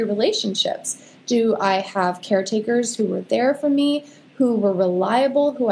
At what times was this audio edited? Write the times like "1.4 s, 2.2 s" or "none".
none

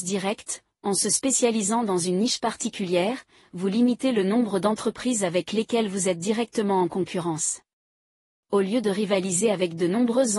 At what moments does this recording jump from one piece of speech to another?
none

